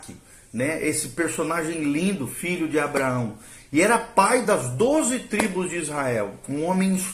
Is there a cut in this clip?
no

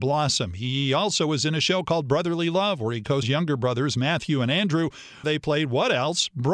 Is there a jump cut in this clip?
yes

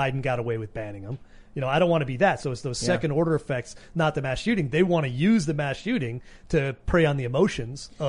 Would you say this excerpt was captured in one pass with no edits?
yes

